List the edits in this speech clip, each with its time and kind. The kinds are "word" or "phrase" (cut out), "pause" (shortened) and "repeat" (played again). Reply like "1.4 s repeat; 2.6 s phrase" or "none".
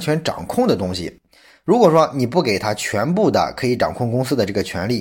none